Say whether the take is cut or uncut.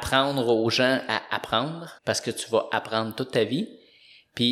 cut